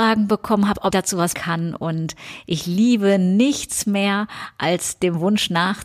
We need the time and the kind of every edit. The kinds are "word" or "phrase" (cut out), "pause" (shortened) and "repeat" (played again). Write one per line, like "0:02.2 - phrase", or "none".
0:00.9 - word
0:01.3 - word